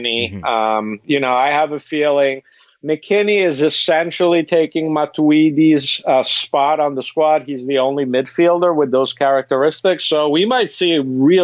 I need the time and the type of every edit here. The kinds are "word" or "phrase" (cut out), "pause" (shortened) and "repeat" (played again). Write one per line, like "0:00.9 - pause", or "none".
none